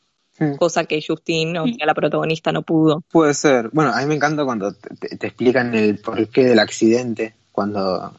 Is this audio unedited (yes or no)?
yes